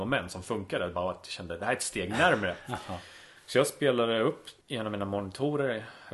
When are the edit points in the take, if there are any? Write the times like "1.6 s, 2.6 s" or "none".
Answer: 4.6 s